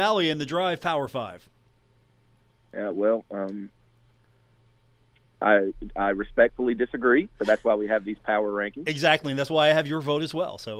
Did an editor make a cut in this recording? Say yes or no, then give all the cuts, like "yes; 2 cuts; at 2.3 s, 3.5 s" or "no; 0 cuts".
no; 0 cuts